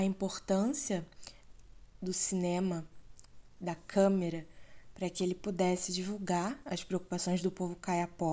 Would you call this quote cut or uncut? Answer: uncut